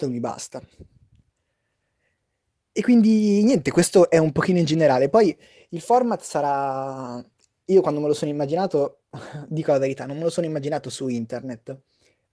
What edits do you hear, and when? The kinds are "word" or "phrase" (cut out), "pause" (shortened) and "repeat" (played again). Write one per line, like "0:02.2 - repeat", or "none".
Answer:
none